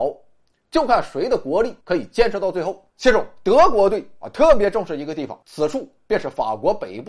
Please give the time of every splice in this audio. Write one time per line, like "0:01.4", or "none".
0:01.8
0:02.9
0:05.4